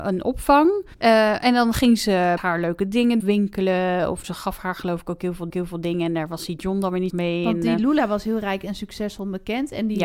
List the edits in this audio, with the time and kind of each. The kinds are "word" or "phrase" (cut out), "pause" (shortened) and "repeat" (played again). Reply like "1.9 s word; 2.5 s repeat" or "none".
0.9 s pause; 2.4 s word; 3.2 s phrase; 4.2 s word; 5.5 s repeat; 7.1 s phrase

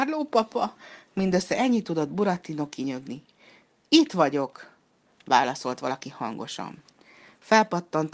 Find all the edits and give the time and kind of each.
none

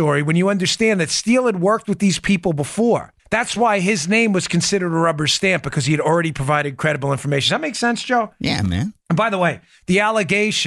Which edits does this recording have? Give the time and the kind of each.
3.2 s pause; 9.0 s pause

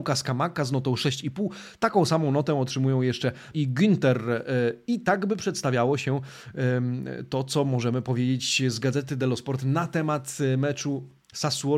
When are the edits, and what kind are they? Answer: 3.5 s word

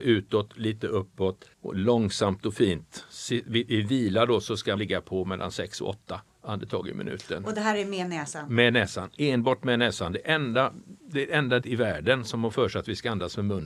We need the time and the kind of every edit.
1.5 s pause; 4.8 s word; 6.3 s pause; 11.0 s pause; 11.6 s word; 12.5 s word

